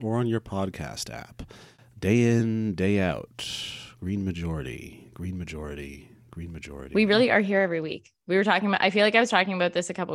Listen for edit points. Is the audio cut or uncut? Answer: uncut